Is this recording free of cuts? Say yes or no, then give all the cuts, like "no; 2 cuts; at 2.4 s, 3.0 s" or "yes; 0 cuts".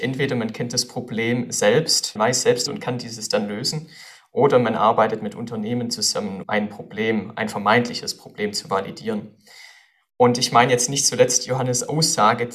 no; 3 cuts; at 2.2 s, 2.7 s, 6.4 s